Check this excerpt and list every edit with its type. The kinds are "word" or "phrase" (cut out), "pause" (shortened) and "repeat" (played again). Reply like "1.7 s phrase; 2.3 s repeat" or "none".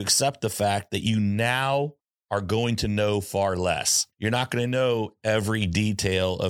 4.1 s pause